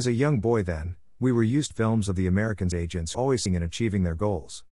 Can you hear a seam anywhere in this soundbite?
yes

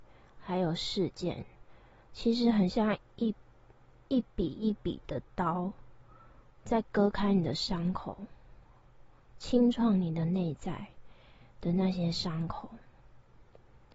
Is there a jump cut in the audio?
no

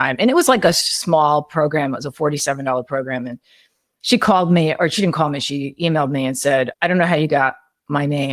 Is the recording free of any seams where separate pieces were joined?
yes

